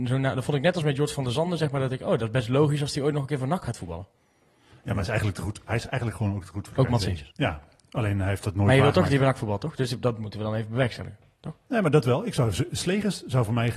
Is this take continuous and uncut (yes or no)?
no